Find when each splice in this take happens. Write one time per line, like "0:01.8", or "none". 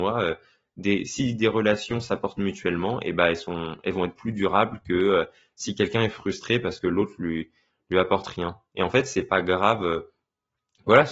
none